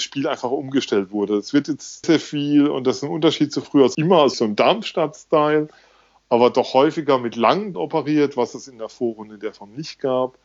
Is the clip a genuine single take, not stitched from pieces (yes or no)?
no